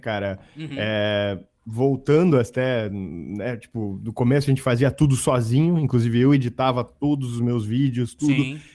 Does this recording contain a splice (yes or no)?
no